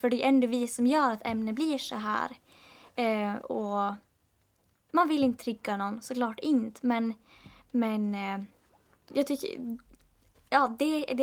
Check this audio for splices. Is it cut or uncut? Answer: cut